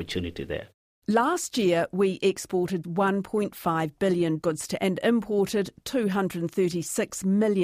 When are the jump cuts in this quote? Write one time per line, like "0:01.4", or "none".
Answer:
0:02.8
0:04.4
0:04.8